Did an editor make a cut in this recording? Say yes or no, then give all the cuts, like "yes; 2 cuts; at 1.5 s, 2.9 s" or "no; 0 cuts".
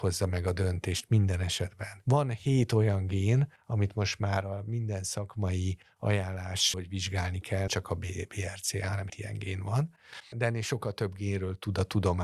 yes; 4 cuts; at 6.7 s, 7.7 s, 9.1 s, 10.3 s